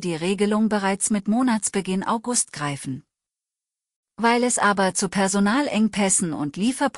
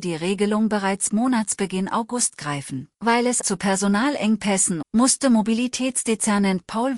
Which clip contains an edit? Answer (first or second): second